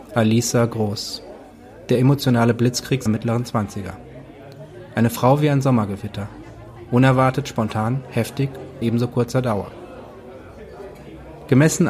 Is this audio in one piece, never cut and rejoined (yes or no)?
no